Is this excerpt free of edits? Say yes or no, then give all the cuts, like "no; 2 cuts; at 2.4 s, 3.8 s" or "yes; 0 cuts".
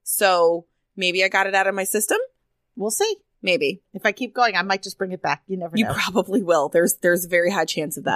yes; 0 cuts